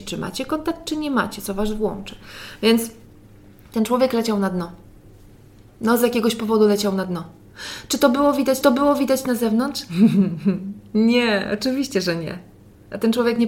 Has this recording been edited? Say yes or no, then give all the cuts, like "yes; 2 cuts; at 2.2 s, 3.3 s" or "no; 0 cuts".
yes; 1 cut; at 8.6 s